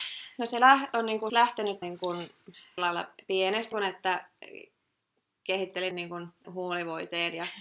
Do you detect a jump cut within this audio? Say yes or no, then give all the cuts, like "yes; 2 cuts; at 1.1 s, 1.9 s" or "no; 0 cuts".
yes; 6 cuts; at 1.3 s, 1.8 s, 2.8 s, 3.7 s, 5.9 s, 6.4 s